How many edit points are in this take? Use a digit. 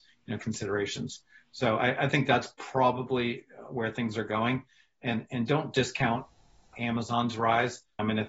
0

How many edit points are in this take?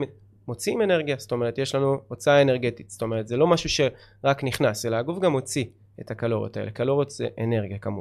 0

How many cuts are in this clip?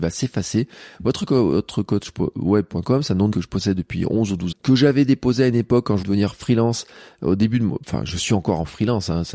3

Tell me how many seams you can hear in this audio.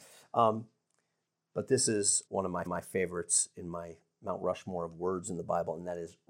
2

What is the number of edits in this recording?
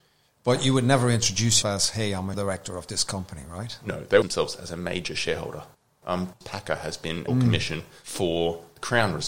5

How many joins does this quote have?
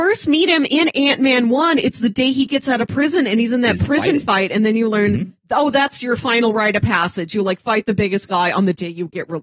0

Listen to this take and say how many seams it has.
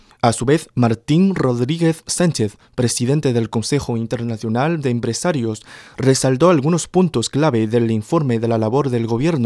0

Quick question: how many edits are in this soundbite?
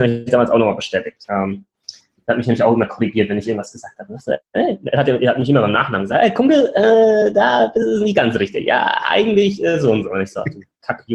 0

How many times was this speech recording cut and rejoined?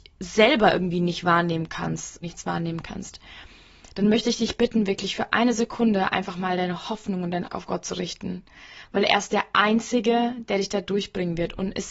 2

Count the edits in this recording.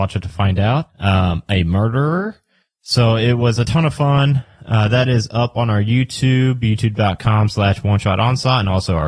0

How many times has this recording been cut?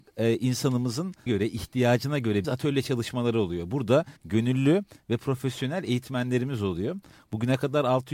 3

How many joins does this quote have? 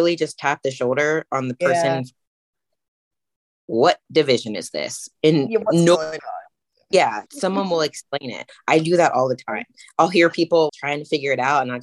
2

